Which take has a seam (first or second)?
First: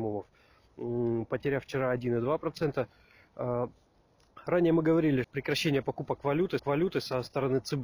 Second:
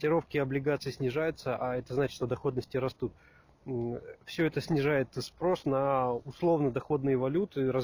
first